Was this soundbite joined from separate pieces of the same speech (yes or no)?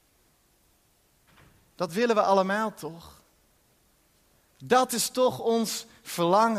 no